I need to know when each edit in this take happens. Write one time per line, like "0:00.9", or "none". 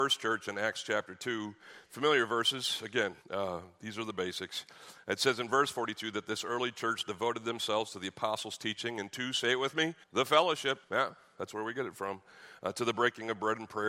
0:03.2
0:10.0
0:10.8